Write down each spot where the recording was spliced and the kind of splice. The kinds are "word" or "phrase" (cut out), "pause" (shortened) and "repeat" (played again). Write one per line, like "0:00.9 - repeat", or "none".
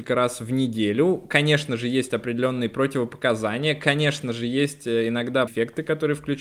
0:05.5 - word